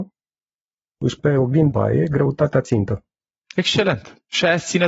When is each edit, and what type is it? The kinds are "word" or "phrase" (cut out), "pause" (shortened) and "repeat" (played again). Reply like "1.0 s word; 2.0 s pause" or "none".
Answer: 1.2 s word; 1.7 s word